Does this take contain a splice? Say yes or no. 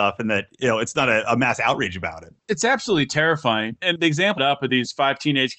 yes